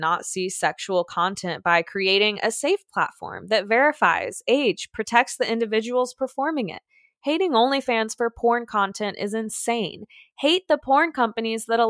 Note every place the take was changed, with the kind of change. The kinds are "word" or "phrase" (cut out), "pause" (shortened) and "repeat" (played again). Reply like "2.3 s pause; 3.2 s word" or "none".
none